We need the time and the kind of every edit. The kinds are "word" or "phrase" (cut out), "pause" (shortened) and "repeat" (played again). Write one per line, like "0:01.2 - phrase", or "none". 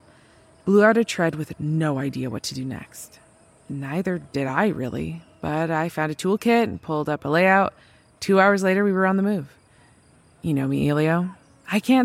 none

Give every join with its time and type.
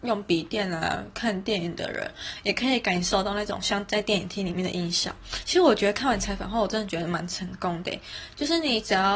none

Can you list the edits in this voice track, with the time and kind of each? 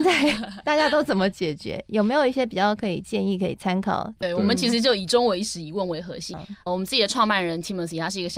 0:06.3 - phrase
0:06.7 - word

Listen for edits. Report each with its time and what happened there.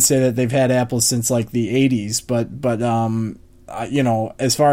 none

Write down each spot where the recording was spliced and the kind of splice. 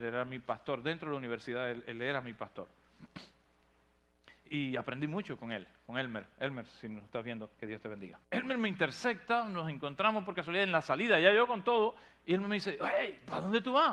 0:07.5 - pause
0:08.2 - pause

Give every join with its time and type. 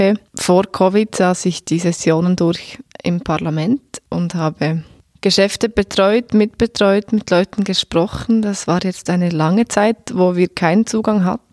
none

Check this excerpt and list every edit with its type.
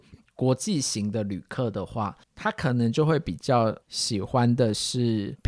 0:02.2 - pause
0:03.8 - pause

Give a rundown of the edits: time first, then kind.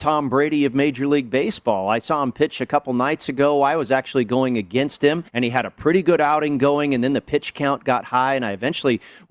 0:05.3 - pause

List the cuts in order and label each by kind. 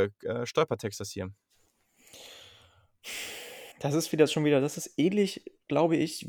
0:03.7 - pause

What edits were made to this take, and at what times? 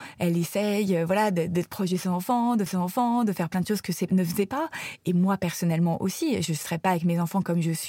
0:02.7 - repeat
0:04.1 - word

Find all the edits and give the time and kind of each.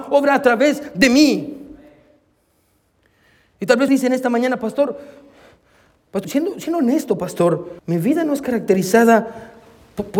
0:03.9 - word
0:06.2 - word
0:07.8 - pause

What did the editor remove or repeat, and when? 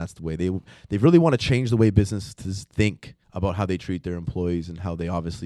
0:03.2 - pause

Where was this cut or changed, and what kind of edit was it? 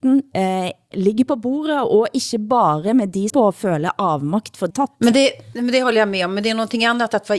0:00.9 - word
0:03.3 - word
0:04.7 - phrase

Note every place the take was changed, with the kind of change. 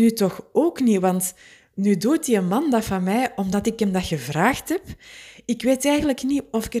none

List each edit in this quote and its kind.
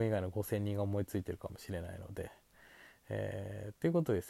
none

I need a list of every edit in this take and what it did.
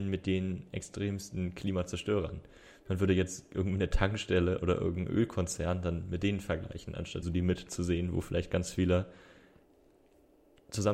0:07.2 - word

